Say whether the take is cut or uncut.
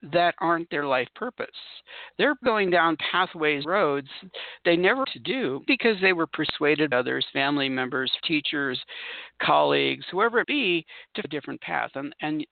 cut